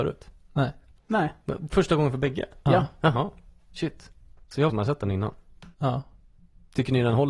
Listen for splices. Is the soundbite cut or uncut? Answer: cut